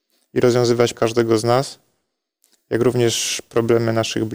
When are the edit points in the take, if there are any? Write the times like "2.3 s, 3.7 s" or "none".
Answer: 0.9 s